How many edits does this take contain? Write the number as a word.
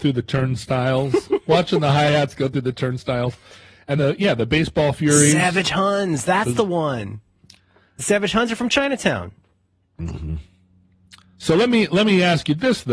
one